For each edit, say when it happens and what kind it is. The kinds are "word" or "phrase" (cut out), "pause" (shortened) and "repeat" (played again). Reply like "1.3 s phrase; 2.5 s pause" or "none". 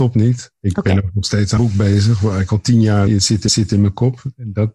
1.6 s word; 3.1 s word; 3.5 s repeat

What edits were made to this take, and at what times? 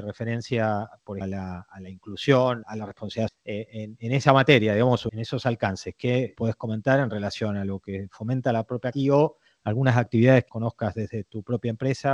1.2 s word; 2.6 s word; 3.3 s word; 4.0 s word; 5.1 s word; 6.3 s word; 8.9 s word; 10.5 s word

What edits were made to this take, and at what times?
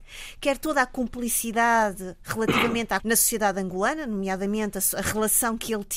3.0 s phrase

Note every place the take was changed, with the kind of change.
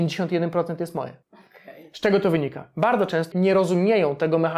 1.2 s pause; 3.3 s word

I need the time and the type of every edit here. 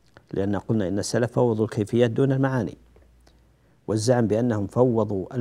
none

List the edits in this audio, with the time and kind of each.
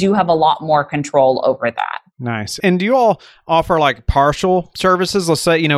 none

